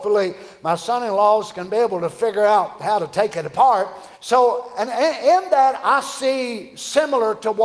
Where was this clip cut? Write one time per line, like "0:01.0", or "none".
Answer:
0:04.1